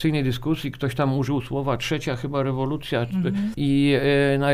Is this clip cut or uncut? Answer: uncut